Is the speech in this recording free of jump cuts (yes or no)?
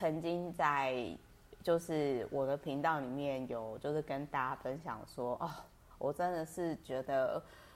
yes